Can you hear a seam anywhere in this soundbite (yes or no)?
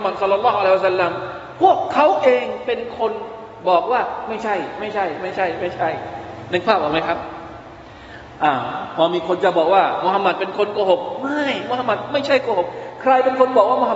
no